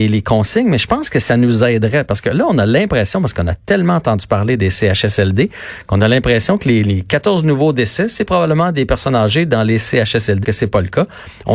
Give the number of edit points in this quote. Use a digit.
1